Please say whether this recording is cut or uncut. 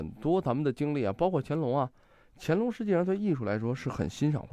uncut